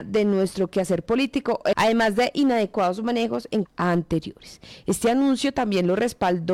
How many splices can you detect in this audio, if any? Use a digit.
2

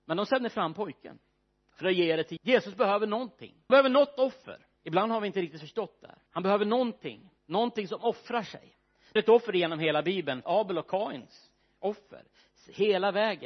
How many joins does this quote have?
8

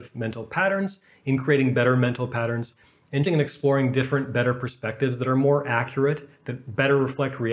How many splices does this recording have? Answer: 1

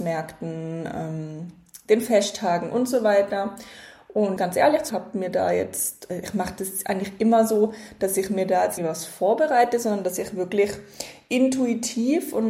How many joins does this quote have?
3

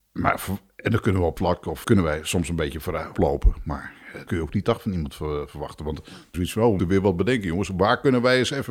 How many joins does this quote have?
7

